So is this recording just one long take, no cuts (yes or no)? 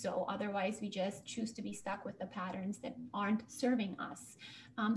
yes